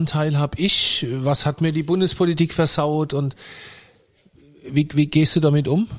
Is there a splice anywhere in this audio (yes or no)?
no